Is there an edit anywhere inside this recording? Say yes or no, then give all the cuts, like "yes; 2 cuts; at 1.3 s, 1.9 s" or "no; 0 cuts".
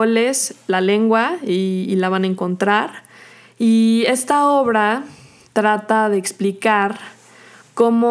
no; 0 cuts